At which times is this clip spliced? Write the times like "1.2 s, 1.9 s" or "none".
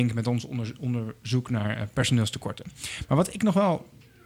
none